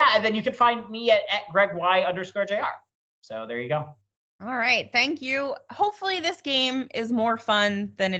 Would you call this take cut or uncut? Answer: uncut